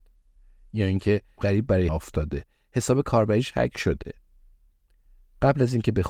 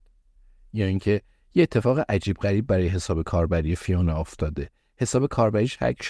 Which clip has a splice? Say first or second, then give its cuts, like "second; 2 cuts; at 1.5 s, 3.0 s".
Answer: first; 2 cuts; at 1.4 s, 1.9 s